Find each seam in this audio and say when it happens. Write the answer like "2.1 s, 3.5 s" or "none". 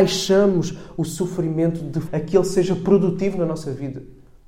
2.1 s